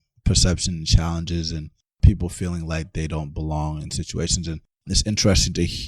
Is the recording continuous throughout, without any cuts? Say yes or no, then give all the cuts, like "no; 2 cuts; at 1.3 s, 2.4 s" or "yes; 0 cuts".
yes; 0 cuts